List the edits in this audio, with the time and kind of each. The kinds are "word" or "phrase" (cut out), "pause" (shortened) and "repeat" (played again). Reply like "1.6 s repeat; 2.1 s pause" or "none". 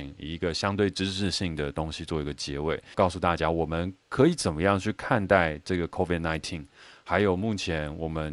none